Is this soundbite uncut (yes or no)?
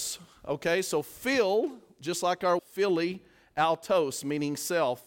no